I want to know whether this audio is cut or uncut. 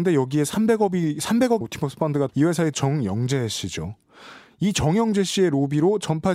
cut